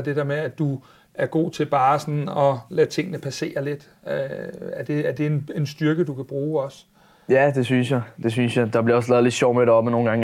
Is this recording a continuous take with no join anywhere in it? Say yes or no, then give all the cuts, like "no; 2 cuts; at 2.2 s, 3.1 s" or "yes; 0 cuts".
yes; 0 cuts